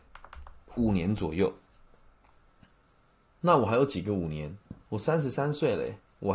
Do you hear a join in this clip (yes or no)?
yes